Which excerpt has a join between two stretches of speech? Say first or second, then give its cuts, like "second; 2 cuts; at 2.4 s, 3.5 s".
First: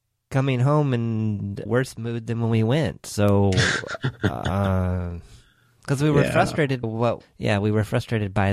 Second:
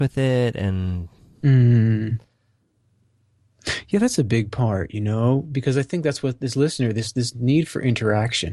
first; 3 cuts; at 1.7 s, 6.8 s, 7.2 s